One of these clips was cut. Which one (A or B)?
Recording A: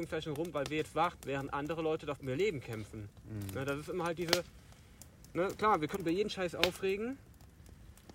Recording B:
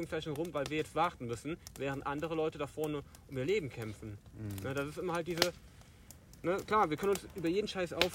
A